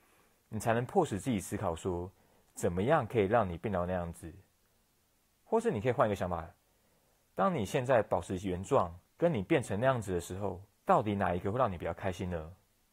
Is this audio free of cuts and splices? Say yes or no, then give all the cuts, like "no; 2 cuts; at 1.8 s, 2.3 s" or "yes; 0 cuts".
no; 2 cuts; at 9.1 s, 10.7 s